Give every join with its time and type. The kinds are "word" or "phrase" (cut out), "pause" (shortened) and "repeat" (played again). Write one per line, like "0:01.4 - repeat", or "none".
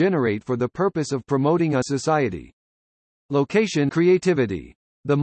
0:01.8 - word
0:03.9 - word